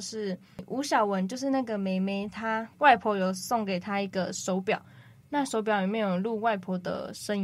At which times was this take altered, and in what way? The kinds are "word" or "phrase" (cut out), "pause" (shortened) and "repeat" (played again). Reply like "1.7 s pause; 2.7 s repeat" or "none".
2.7 s pause